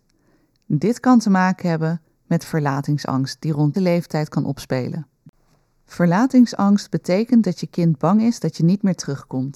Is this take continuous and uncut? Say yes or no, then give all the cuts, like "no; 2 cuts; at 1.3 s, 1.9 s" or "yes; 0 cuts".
no; 1 cut; at 3.7 s